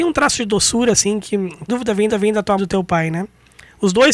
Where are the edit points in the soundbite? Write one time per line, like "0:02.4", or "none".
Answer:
0:01.7
0:02.1
0:02.6

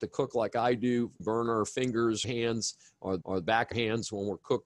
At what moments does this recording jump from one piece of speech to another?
0:01.2
0:02.2
0:03.2
0:03.7

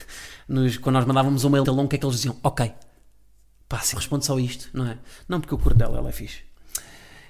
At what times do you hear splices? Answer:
0:01.6
0:03.9

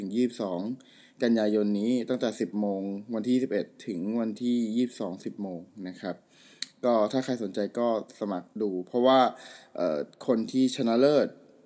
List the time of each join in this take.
0:08.5

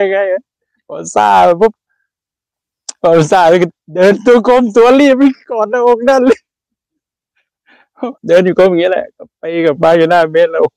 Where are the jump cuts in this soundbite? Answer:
0:08.2

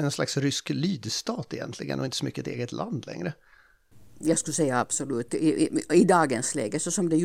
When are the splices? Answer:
none

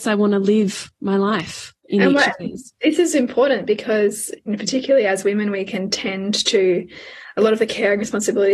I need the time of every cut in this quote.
0:01.8

